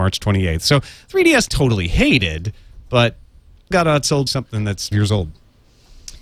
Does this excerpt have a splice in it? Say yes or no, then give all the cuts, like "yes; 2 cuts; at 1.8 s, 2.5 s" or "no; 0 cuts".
yes; 4 cuts; at 1.5 s, 3.7 s, 4.3 s, 4.9 s